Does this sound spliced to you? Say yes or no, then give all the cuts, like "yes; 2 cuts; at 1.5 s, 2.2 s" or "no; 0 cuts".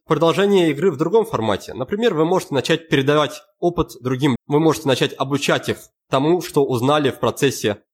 yes; 1 cut; at 4.4 s